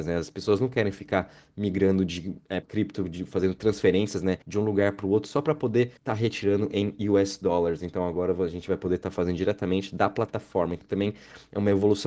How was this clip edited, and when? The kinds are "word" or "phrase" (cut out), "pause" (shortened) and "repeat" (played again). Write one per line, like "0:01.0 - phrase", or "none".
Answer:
0:02.6 - word
0:04.4 - pause
0:06.0 - pause
0:10.8 - word